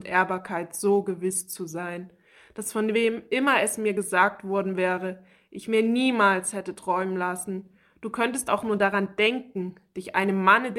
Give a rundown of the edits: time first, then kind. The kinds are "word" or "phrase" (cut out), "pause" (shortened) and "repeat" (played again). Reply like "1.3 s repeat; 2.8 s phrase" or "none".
none